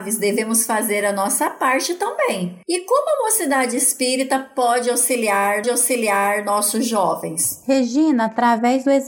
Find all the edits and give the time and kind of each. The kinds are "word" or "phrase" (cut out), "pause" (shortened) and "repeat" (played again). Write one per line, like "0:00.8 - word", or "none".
0:05.6 - repeat

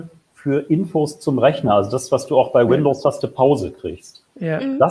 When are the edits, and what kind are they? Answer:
none

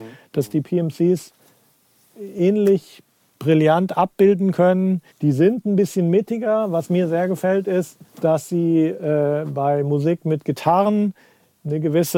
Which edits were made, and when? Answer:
0:05.1 - pause
0:08.1 - pause

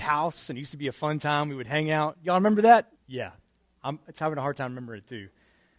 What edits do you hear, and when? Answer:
0:03.0 - pause

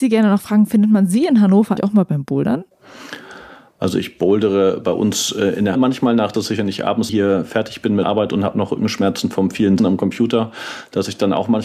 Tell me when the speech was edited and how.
0:01.8 - word
0:05.7 - word
0:06.3 - word
0:07.1 - word
0:08.0 - word
0:09.8 - word

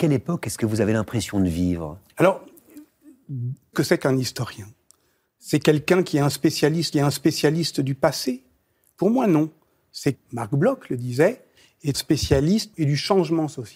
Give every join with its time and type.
0:03.7 - word
0:06.9 - repeat
0:10.1 - phrase
0:11.9 - word
0:12.7 - phrase

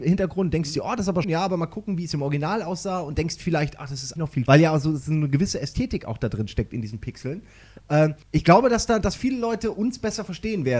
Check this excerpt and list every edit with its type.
0:01.2 - word
0:04.2 - word
0:04.5 - word
0:08.2 - pause

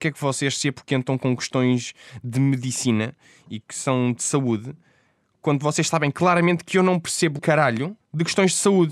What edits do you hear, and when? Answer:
0:03.6 - word
0:07.4 - word

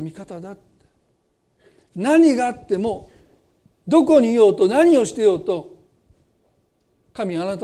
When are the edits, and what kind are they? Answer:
none

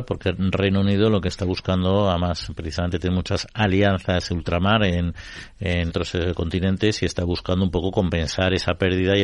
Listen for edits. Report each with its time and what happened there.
0:05.9 - word

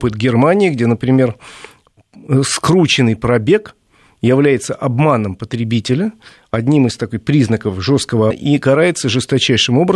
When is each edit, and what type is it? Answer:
0:08.3 - word

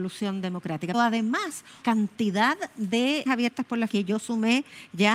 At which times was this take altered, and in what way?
0:00.9 - word
0:01.8 - word
0:03.3 - word
0:03.9 - word

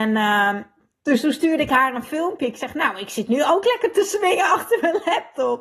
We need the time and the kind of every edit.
none

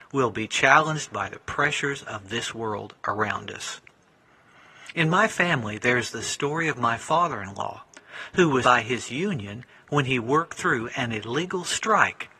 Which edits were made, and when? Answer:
0:08.6 - word

